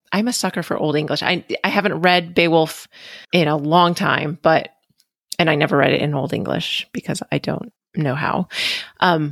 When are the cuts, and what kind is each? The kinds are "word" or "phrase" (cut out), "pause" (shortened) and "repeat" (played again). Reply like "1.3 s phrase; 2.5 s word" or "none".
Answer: 3.2 s pause; 7.8 s pause